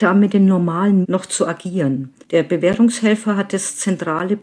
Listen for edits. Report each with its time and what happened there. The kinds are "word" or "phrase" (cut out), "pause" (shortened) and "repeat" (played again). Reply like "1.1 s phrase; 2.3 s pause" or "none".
1.0 s word; 2.2 s pause